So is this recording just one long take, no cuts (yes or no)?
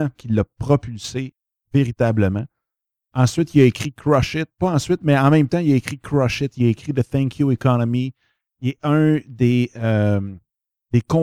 yes